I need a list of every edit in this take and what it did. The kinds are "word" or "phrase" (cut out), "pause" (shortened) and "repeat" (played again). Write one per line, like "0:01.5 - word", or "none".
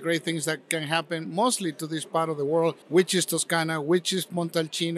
0:02.8 - pause